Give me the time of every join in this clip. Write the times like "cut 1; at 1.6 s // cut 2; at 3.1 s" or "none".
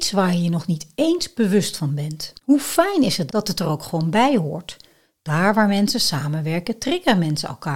cut 1; at 2.4 s // cut 2; at 3.3 s